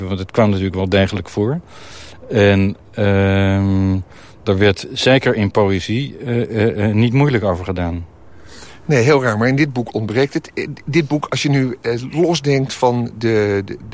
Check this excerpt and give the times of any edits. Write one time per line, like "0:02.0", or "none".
none

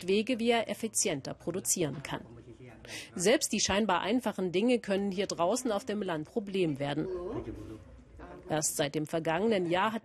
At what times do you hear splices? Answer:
0:06.2

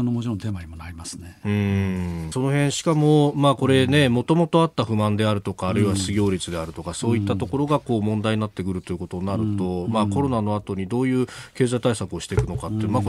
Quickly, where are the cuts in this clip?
0:02.3

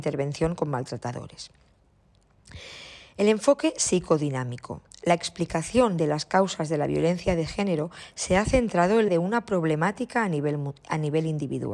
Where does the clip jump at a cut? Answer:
0:09.1

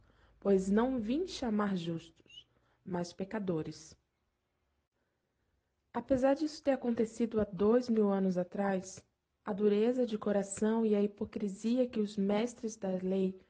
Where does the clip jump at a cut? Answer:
none

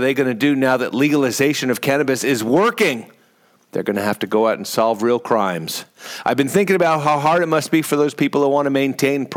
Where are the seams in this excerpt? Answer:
none

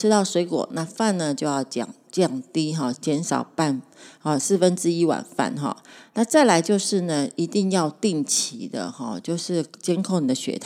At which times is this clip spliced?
none

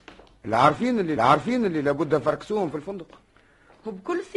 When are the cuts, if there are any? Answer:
0:01.2

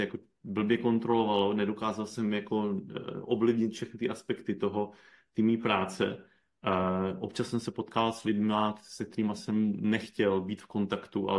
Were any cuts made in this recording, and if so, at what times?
none

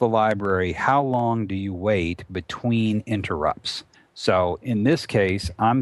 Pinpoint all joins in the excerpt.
0:03.9

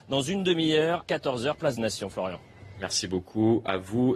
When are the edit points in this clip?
0:01.0
0:01.8

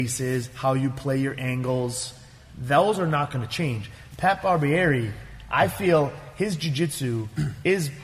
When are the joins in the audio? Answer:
none

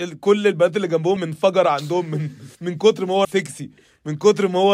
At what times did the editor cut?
0:01.2
0:02.5
0:03.2

